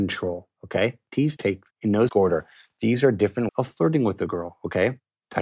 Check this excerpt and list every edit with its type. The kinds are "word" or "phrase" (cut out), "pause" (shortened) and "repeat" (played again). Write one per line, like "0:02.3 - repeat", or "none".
0:01.4 - word
0:01.7 - word
0:02.1 - word
0:03.5 - word